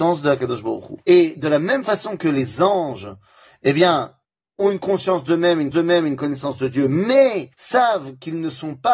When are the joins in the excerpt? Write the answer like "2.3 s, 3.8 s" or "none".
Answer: 1.0 s, 5.7 s, 7.5 s